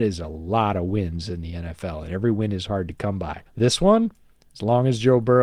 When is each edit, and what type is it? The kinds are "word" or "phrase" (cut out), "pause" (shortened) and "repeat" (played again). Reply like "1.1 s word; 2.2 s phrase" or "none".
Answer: 3.5 s pause